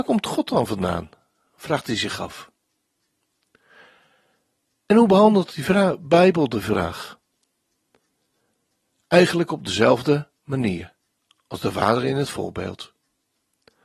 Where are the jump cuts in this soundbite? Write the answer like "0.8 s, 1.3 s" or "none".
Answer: none

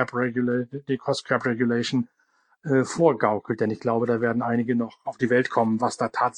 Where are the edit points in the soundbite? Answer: none

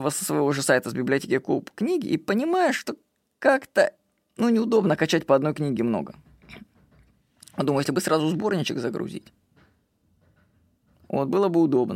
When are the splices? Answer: none

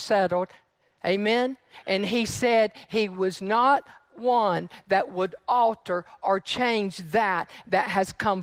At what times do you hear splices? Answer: none

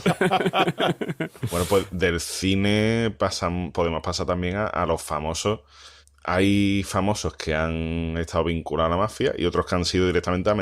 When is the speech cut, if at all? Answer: 6.0 s

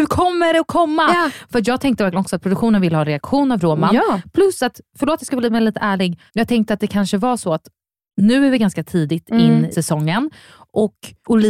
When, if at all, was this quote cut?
6.3 s, 9.7 s

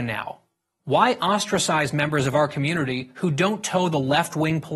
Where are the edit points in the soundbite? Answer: none

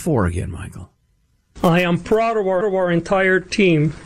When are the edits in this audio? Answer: 2.6 s

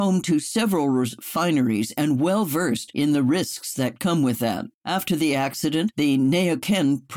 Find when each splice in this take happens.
4.7 s

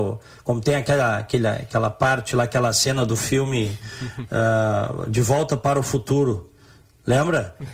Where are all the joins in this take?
none

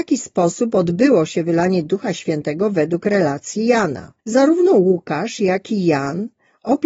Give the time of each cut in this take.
4.2 s

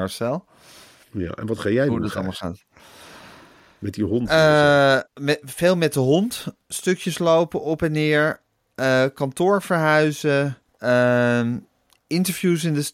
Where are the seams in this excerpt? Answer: 5.1 s, 10.7 s

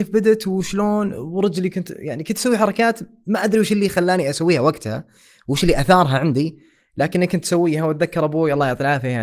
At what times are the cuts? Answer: none

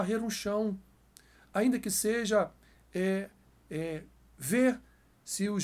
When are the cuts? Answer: none

